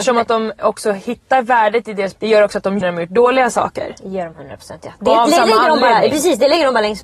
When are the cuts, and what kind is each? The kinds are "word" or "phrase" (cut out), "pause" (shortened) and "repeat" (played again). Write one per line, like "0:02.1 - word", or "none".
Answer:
0:02.1 - word
0:02.8 - word

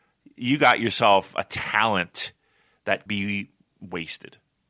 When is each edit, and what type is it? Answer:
0:03.1 - word

